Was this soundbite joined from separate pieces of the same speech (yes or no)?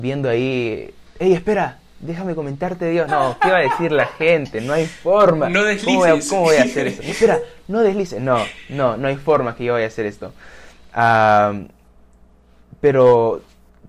yes